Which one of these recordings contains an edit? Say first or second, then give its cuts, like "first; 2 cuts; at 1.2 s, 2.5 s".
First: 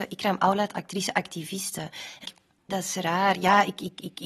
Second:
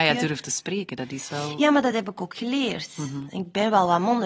first; 2 cuts; at 2.2 s, 2.7 s